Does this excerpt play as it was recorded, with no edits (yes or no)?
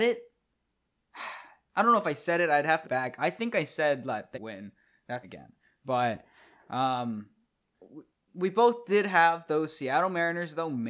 no